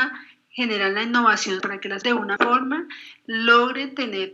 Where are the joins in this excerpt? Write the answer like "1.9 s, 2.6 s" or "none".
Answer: 1.6 s, 2.0 s, 2.4 s